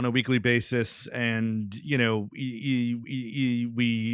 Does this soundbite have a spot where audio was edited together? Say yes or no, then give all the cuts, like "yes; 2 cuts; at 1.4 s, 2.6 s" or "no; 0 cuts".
yes; 1 cut; at 3.0 s